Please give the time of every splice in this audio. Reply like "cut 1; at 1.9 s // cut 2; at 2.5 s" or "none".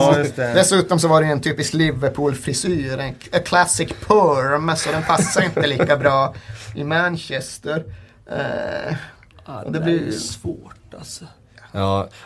none